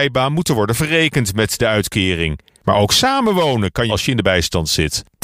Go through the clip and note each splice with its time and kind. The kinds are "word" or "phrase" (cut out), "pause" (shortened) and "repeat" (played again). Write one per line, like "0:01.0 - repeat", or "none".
0:03.9 - phrase

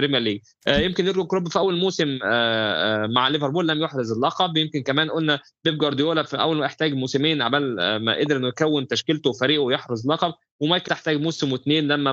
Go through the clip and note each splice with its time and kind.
0:10.9 - word

